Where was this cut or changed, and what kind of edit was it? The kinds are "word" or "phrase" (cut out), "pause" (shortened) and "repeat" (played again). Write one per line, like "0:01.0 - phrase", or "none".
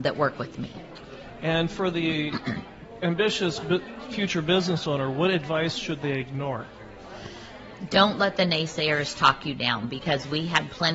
none